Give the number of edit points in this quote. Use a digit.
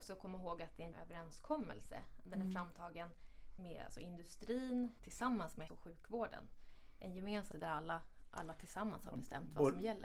5